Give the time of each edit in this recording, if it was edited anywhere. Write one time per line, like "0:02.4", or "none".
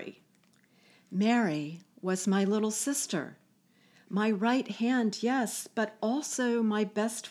none